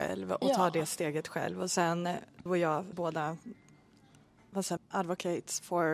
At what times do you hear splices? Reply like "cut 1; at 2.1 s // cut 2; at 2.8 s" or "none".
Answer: cut 1; at 2.5 s // cut 2; at 2.9 s // cut 3; at 4.8 s